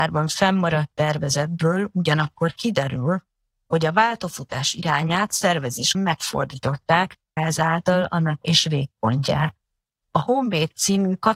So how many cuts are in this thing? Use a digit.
3